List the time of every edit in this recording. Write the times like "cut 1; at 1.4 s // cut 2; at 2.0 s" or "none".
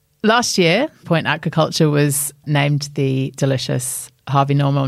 cut 1; at 1.0 s